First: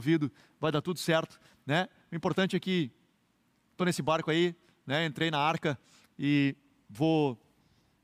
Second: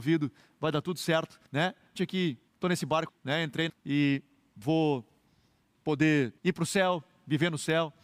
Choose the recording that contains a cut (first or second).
second